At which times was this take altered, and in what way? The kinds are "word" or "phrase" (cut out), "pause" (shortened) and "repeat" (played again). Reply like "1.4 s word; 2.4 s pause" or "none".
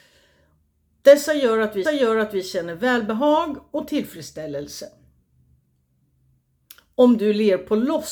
1.8 s repeat